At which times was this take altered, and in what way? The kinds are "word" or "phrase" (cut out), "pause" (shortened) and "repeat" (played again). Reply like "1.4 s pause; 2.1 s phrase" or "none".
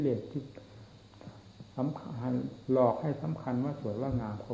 1.7 s pause